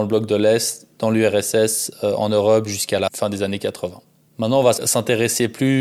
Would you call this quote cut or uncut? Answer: uncut